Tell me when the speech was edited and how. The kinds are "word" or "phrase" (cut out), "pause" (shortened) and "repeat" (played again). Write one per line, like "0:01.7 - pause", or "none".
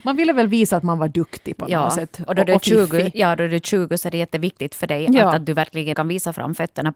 0:05.9 - word